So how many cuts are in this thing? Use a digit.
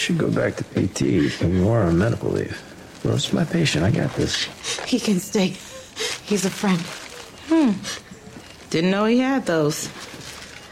0